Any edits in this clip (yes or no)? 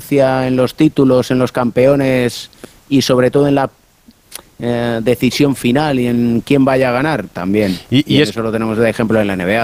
no